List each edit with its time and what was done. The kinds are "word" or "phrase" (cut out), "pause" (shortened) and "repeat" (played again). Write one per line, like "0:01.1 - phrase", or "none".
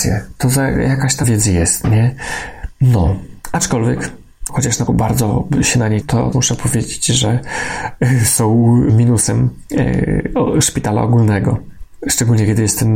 0:01.2 - word
0:04.5 - word
0:04.9 - word
0:06.0 - word
0:06.3 - word
0:08.9 - word